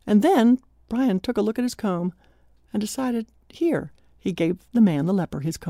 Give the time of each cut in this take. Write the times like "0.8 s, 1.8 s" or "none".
none